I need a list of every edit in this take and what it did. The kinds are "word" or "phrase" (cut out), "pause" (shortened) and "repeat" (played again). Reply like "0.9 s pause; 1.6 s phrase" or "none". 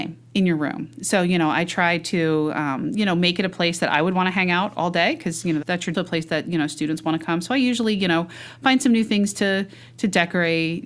5.6 s word; 5.9 s phrase